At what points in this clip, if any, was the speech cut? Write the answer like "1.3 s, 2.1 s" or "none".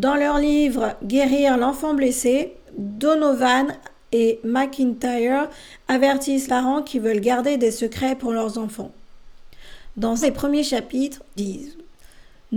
2.6 s, 6.5 s, 10.2 s, 11.4 s